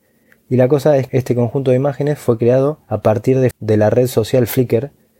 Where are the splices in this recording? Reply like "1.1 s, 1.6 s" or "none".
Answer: 1.1 s, 2.8 s, 3.5 s